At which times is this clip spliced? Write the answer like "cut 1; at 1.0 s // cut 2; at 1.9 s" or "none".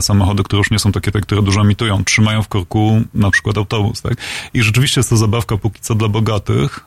cut 1; at 1.1 s